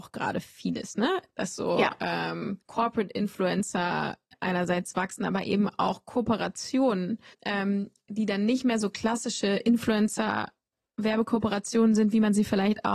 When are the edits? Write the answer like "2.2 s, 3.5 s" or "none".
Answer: 2.6 s, 7.3 s